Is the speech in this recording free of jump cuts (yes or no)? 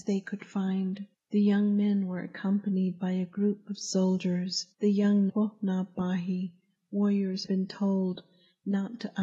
no